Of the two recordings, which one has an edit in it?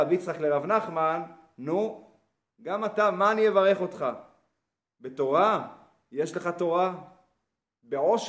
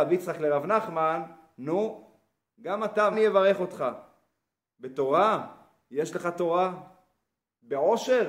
second; 1 cut; at 3.1 s

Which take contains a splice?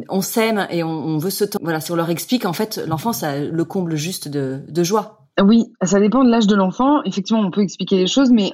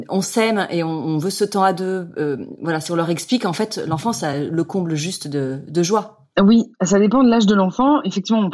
first; 1 cut; at 1.6 s

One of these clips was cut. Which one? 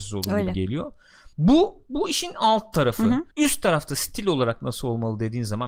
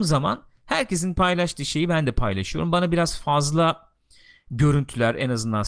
first; 2 cuts; at 1.3 s, 3.3 s

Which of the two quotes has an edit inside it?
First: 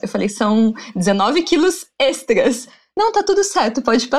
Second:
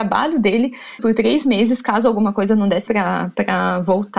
second; 2 cuts; at 1.0 s, 2.9 s

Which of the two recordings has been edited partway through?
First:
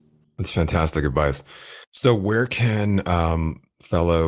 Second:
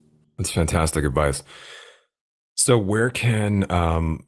first; 1 cut; at 1.8 s

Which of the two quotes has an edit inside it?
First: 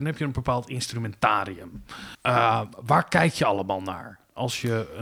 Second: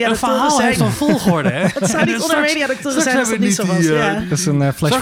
first; 1 cut; at 2.1 s

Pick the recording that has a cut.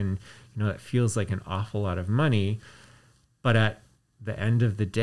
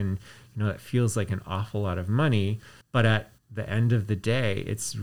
second; 2 cuts; at 2.8 s, 3.4 s

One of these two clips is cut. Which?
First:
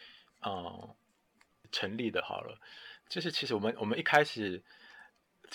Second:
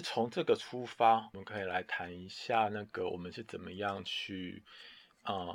first; 1 cut; at 3.0 s

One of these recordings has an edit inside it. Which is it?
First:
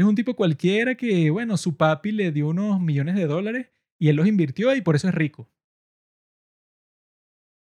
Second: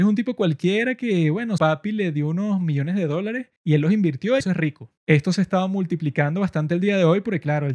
second; 4 cuts; at 1.6 s, 3.6 s, 4.4 s, 5.0 s

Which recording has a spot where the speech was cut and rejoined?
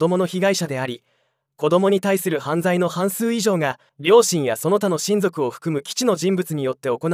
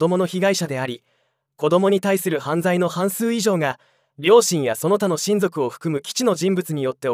first; 1 cut; at 3.9 s

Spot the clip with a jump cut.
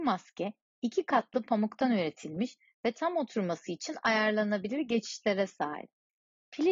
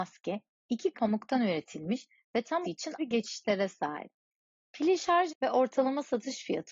second; 4 cuts; at 0.9 s, 2.6 s, 3.0 s, 5.3 s

